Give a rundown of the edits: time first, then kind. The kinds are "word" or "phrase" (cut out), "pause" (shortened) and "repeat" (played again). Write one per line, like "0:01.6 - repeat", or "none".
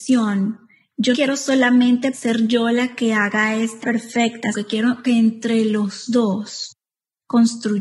0:01.1 - word
0:02.1 - word
0:03.8 - word
0:04.5 - word